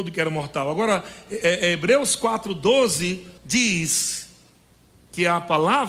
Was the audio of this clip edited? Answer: yes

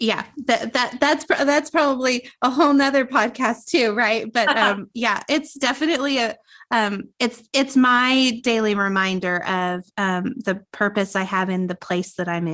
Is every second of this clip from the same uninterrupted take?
no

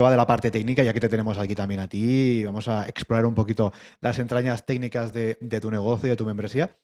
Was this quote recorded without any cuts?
yes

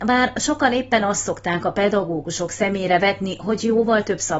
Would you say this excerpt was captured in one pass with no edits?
yes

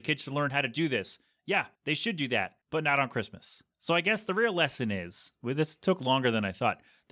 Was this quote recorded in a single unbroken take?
no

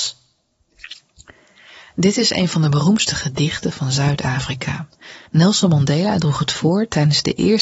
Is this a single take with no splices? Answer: no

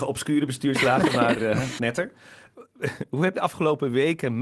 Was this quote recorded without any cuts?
no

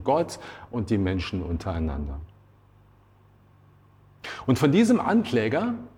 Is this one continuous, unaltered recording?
yes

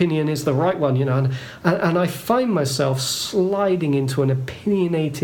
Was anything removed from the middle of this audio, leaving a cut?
no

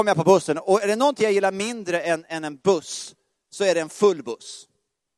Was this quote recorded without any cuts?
yes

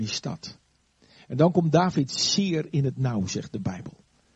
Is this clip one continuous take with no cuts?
yes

